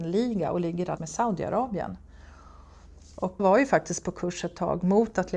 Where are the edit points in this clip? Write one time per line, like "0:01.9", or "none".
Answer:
0:01.0
0:03.4